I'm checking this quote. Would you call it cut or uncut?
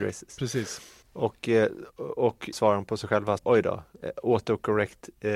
cut